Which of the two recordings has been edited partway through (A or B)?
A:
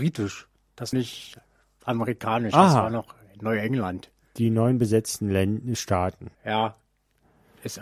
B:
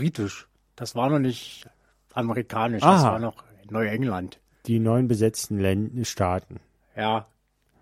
A